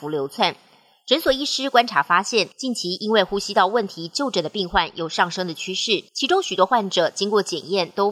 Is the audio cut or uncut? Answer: cut